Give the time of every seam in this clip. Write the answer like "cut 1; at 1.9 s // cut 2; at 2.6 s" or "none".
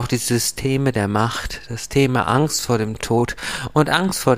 none